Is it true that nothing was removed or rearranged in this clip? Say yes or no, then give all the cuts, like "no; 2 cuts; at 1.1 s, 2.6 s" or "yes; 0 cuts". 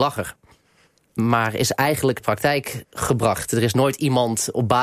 no; 1 cut; at 2.2 s